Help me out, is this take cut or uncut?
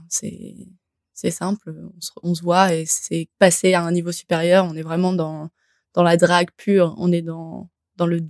cut